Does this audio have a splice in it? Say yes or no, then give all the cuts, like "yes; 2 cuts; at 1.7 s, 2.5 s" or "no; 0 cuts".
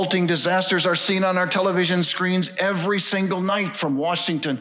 no; 0 cuts